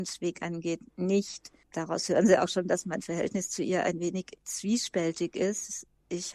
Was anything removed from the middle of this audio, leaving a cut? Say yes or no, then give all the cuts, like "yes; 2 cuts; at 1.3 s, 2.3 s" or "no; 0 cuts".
no; 0 cuts